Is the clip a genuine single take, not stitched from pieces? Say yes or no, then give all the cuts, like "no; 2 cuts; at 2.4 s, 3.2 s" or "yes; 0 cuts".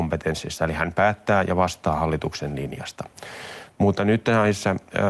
yes; 0 cuts